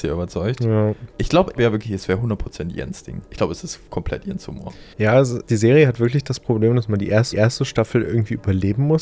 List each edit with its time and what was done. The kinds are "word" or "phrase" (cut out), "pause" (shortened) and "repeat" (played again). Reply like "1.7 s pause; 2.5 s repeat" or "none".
1.1 s pause; 1.6 s phrase; 3.3 s pause; 4.9 s pause; 5.4 s word; 7.3 s repeat